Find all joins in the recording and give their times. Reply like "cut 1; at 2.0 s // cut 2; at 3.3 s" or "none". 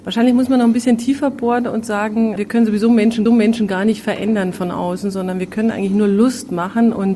cut 1; at 2.4 s // cut 2; at 3.3 s